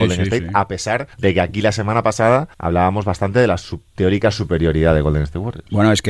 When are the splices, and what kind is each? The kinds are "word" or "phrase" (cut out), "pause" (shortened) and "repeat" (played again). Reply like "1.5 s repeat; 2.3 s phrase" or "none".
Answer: 1.1 s pause; 2.5 s pause